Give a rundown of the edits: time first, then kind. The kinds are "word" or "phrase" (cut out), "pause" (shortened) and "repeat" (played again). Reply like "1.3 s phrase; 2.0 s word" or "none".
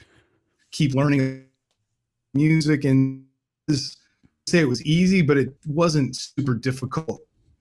5.6 s pause